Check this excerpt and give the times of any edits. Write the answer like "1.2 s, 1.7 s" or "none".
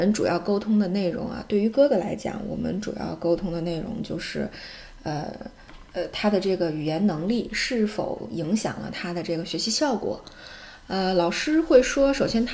5.9 s